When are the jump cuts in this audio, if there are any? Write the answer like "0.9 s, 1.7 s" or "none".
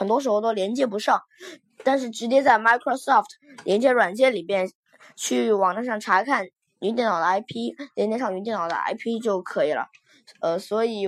none